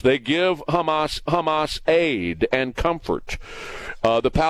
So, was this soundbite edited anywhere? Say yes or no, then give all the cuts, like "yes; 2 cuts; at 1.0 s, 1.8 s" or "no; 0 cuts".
yes; 1 cut; at 1.3 s